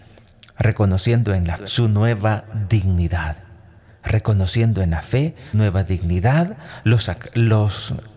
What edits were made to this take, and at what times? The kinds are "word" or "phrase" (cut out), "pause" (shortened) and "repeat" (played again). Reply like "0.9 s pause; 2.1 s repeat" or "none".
1.6 s word; 5.5 s word